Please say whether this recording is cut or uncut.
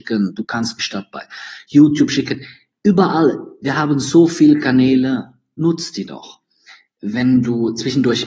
uncut